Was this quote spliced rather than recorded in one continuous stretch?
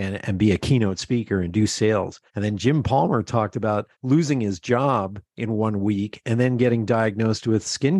yes; 3 cuts; at 2.3 s, 3.9 s, 5.3 s

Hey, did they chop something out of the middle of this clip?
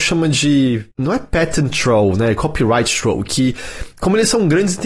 yes; 1 cut; at 0.9 s

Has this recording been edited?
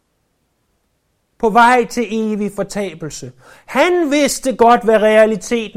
no; 0 cuts

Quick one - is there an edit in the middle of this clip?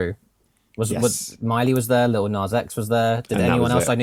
no; 0 cuts

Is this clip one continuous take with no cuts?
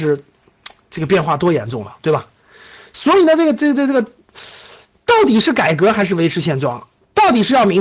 yes; 0 cuts

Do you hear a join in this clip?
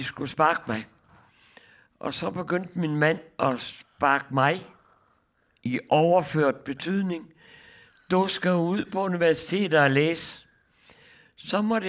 no; 0 cuts

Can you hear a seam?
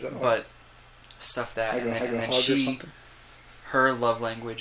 yes; 2 cuts; at 1.5 s, 2.0 s

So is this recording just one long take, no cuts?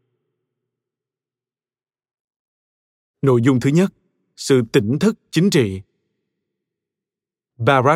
yes; 0 cuts

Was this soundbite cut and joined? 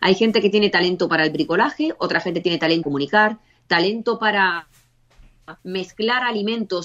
yes; 2 cuts; at 2.8 s, 5.6 s

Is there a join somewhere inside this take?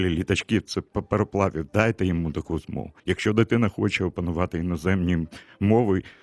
yes; 1 cut; at 3.0 s

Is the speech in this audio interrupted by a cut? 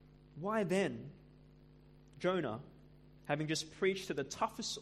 no; 0 cuts

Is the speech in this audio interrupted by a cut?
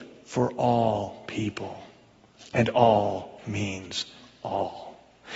no; 0 cuts

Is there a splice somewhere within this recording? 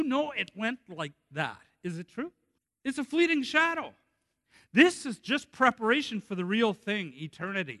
yes; 1 cut; at 2.6 s

